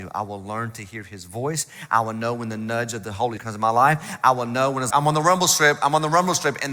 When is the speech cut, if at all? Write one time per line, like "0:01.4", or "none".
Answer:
0:03.4
0:04.9

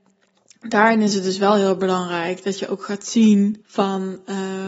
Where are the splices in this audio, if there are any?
0:03.6

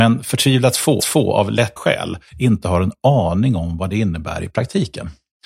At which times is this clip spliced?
0:01.0
0:01.8
0:02.3

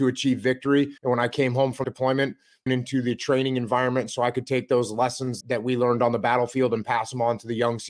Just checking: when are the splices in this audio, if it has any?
0:01.0
0:01.8
0:02.7
0:05.4

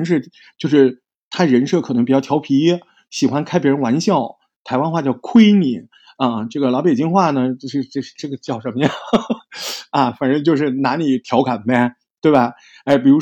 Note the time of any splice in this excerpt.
none

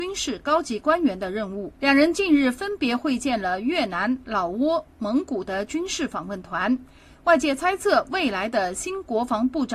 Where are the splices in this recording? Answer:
0:01.7

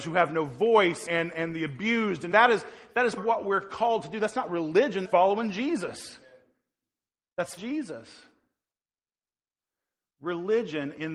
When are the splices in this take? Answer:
0:01.1
0:02.3
0:03.2
0:05.0
0:07.6

